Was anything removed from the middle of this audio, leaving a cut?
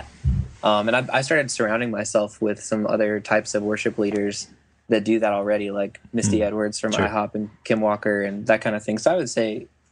no; 0 cuts

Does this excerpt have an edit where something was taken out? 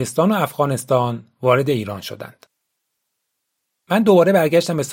no; 0 cuts

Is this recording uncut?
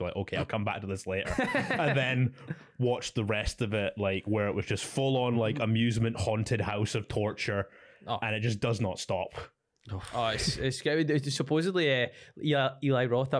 yes; 0 cuts

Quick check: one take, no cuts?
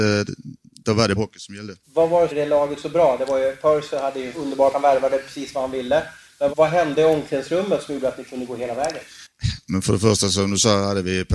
no; 6 cuts; at 1.2 s, 1.8 s, 2.3 s, 4.3 s, 4.7 s, 6.5 s

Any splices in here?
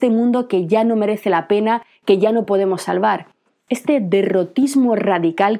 no; 0 cuts

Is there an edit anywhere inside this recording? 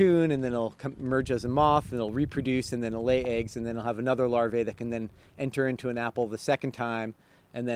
no; 0 cuts

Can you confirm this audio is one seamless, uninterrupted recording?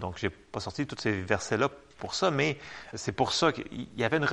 no; 1 cut; at 2.9 s

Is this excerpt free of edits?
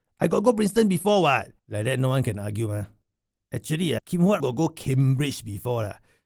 no; 3 cuts; at 1.6 s, 4.0 s, 4.4 s

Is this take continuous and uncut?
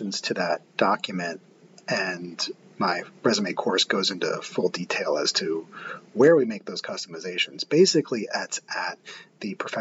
yes; 0 cuts

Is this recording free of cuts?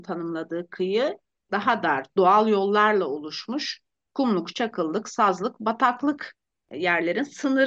yes; 0 cuts

